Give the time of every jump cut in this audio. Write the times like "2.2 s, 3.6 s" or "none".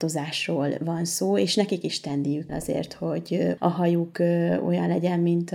2.5 s, 3.6 s